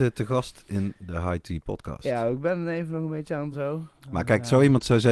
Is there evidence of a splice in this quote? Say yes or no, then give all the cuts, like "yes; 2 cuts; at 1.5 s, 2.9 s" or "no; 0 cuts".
yes; 1 cut; at 3.5 s